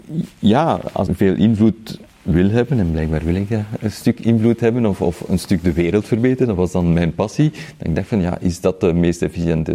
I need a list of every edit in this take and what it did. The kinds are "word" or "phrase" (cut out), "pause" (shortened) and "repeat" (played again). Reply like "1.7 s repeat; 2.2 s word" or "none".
1.1 s word